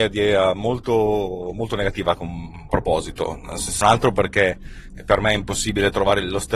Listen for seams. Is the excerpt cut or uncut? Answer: cut